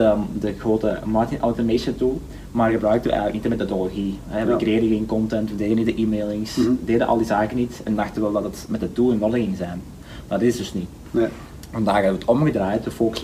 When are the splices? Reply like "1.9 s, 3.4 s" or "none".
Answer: none